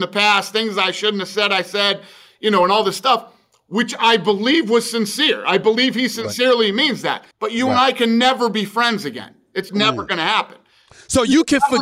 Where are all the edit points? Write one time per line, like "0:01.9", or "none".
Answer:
0:07.3
0:09.7